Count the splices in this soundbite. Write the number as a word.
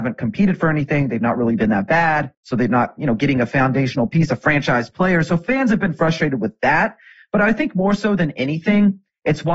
one